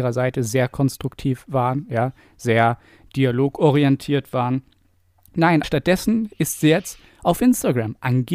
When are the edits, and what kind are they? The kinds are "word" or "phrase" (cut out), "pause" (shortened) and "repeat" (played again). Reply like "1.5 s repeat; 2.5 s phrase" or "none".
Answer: 5.6 s word